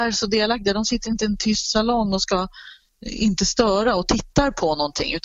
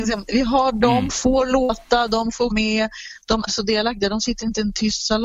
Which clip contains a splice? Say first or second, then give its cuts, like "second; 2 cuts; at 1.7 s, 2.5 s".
second; 2 cuts; at 2.5 s, 3.5 s